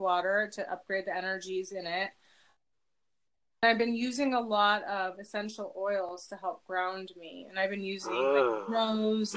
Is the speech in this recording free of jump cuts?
yes; 0 cuts

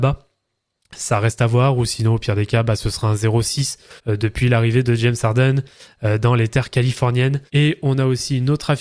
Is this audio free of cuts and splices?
no; 2 cuts; at 4.0 s, 7.5 s

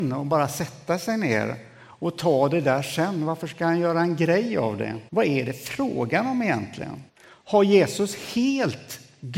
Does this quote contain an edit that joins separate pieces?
yes; 2 cuts; at 5.1 s, 7.1 s

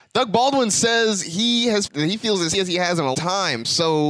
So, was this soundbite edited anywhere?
yes; 3 cuts; at 1.9 s, 2.5 s, 3.1 s

